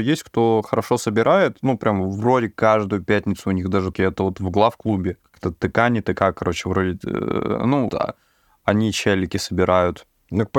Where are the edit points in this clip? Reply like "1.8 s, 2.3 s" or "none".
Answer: 3.9 s, 5.2 s, 7.9 s

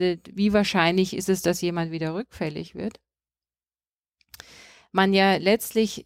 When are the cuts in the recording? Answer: none

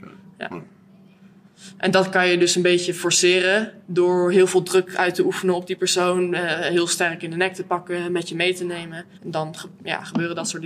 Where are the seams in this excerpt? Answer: 3.8 s, 9.1 s

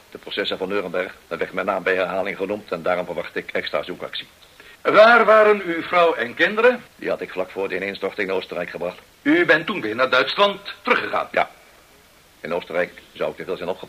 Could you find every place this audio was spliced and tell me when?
1.2 s, 4.7 s, 6.9 s, 9.0 s, 10.8 s

